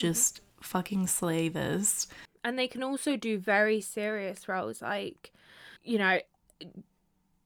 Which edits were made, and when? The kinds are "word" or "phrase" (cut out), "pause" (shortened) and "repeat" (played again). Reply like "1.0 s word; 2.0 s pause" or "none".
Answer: 5.8 s pause